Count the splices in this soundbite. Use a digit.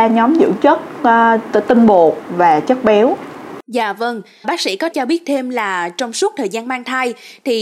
3